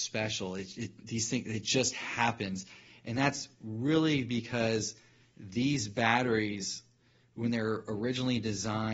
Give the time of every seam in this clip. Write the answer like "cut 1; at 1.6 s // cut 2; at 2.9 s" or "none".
none